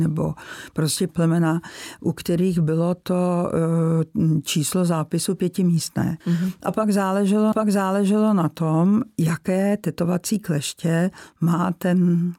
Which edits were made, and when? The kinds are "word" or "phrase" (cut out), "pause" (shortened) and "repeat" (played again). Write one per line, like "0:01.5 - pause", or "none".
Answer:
0:01.1 - word
0:06.2 - pause
0:07.5 - repeat